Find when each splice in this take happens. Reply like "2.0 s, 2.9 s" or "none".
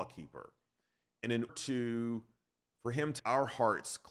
1.5 s, 3.2 s